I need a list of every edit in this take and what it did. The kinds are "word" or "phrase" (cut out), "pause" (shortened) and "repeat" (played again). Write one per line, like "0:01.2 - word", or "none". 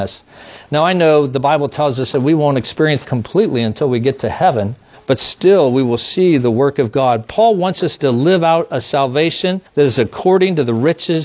0:03.0 - word
0:04.9 - pause
0:09.7 - pause